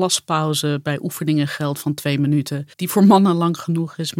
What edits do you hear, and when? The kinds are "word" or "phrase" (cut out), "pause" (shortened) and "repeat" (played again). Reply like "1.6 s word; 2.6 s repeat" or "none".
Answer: 2.7 s pause